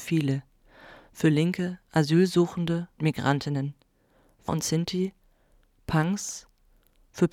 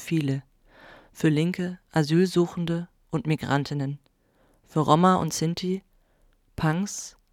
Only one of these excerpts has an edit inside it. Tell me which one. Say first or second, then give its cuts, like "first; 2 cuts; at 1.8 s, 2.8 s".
first; 2 cuts; at 3.0 s, 4.5 s